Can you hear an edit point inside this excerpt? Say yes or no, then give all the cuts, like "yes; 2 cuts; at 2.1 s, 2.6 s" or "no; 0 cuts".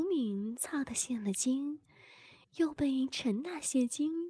yes; 1 cut; at 2.4 s